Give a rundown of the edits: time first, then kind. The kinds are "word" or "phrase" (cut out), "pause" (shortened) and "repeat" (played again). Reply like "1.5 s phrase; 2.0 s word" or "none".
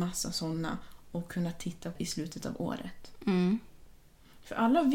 2.0 s word

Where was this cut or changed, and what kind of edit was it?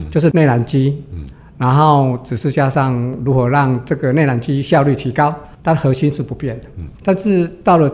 6.9 s pause

